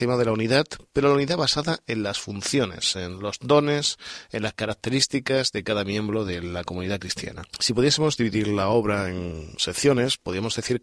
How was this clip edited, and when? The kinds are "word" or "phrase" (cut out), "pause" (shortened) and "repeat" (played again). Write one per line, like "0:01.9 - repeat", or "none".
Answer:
0:07.5 - pause